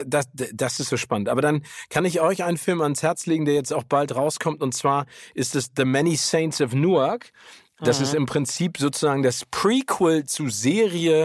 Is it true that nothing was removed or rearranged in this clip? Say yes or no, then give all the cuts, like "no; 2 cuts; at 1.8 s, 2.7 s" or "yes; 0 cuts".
yes; 0 cuts